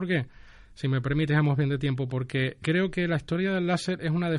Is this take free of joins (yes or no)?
no